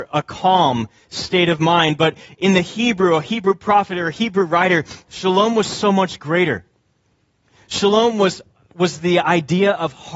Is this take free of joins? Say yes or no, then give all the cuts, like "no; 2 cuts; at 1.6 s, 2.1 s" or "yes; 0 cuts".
yes; 0 cuts